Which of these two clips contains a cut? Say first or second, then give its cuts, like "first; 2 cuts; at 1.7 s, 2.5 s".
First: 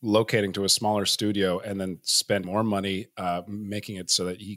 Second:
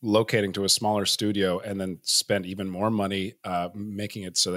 first; 1 cut; at 2.4 s